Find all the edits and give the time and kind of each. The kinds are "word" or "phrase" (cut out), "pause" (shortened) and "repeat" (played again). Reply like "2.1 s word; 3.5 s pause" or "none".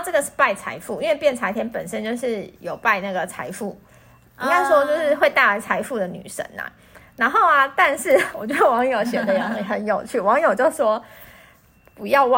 none